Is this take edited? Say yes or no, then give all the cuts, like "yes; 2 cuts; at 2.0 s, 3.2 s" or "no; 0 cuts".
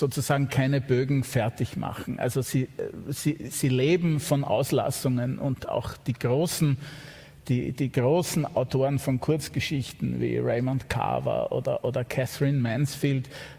no; 0 cuts